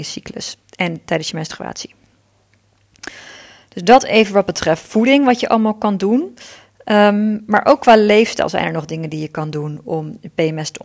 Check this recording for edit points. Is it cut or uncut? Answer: uncut